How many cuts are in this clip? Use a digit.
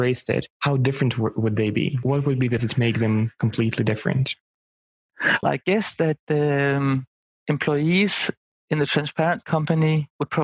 2